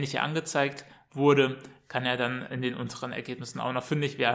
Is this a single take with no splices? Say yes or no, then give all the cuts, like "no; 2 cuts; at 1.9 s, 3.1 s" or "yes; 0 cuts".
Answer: yes; 0 cuts